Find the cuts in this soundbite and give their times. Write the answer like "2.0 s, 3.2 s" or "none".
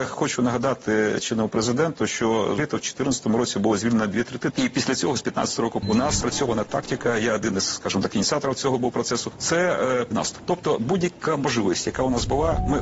2.6 s, 4.5 s, 5.8 s, 6.2 s, 10.1 s